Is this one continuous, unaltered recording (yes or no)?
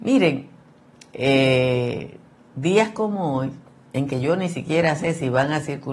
yes